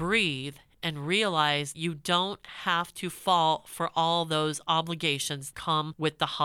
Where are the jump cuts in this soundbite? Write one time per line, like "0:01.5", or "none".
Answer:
0:01.7
0:05.5